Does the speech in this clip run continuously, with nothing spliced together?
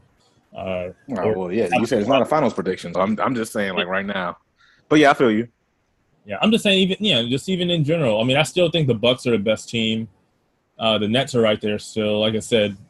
no; 1 cut; at 2.9 s

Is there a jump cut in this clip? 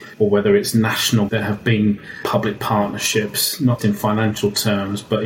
yes; 3 cuts; at 1.3 s, 2.6 s, 3.8 s

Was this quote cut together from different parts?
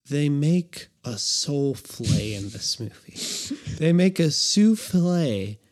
yes; 1 cut; at 1.0 s

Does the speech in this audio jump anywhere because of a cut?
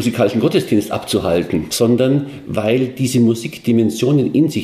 no; 0 cuts

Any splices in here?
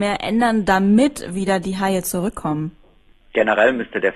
no; 0 cuts

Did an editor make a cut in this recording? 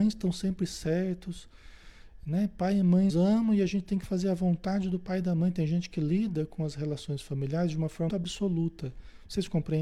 yes; 3 cuts; at 3.1 s, 4.0 s, 8.1 s

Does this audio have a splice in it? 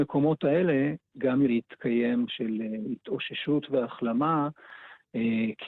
yes; 2 cuts; at 1.5 s, 2.3 s

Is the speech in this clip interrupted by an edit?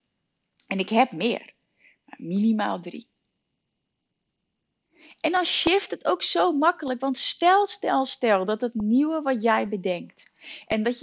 no; 0 cuts

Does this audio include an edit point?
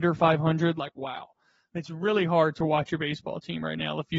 no; 0 cuts

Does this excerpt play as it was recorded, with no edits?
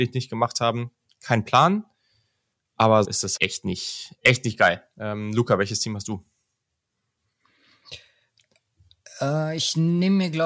no; 2 cuts; at 3.0 s, 3.4 s

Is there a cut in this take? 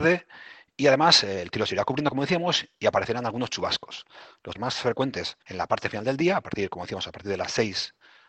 yes; 2 cuts; at 4.5 s, 5.4 s

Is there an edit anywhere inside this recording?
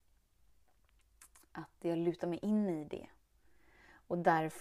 no; 0 cuts

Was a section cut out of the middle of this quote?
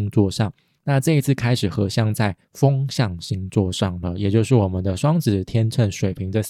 yes; 1 cut; at 2.4 s

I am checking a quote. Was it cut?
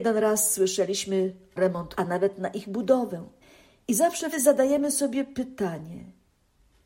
yes; 4 cuts; at 1.6 s, 2.0 s, 3.4 s, 4.3 s

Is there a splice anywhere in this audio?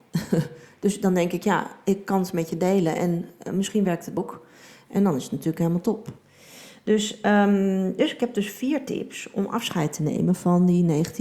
yes; 1 cut; at 4.2 s

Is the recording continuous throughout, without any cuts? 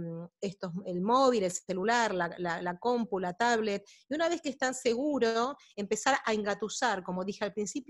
yes; 0 cuts

